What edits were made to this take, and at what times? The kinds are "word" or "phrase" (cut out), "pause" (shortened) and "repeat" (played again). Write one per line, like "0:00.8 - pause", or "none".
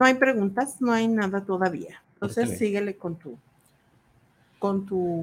0:02.0 - pause

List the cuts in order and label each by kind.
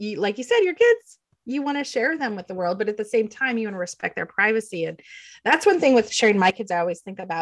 none

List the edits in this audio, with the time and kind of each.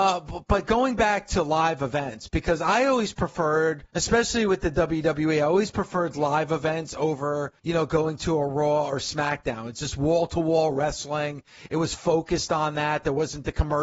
0:03.9 - pause
0:07.6 - pause

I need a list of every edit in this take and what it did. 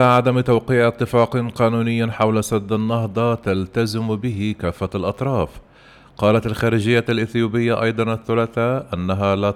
none

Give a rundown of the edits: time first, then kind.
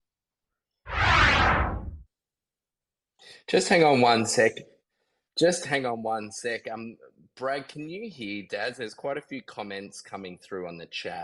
none

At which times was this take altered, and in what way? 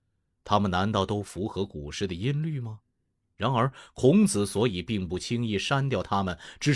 none

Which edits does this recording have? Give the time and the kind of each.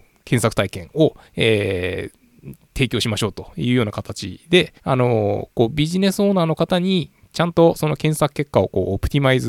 0:01.3 - pause
0:04.8 - pause

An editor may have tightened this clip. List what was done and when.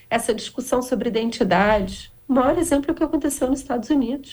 0:02.2 - pause

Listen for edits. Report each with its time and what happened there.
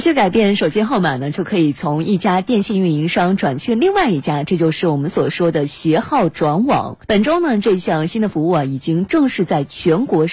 0:07.0 - pause

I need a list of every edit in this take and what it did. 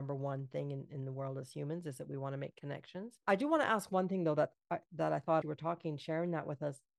0:05.4 - phrase

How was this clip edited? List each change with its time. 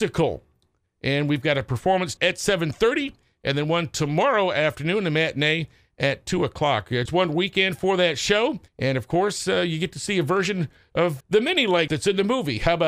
0:02.2 - word
0:07.1 - word
0:08.7 - pause
0:11.2 - word
0:11.9 - word

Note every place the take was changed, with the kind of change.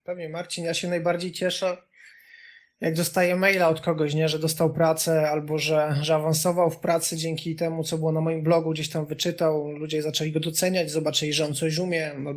none

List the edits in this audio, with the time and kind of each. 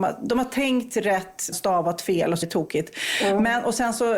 0:01.5 - word
0:02.4 - word

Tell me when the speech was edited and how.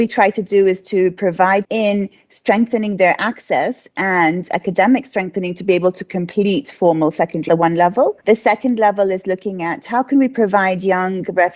0:01.6 - word
0:07.5 - phrase
0:08.2 - pause

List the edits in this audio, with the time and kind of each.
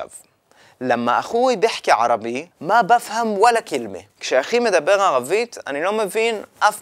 0:02.5 - pause
0:04.1 - pause

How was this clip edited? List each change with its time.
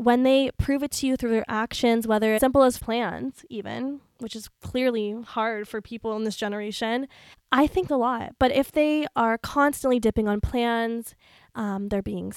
0:02.4 - phrase
0:02.8 - phrase
0:07.3 - pause
0:07.9 - phrase

